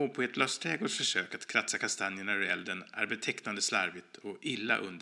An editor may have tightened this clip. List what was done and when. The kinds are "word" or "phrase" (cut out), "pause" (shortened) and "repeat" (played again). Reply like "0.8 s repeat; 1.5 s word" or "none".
none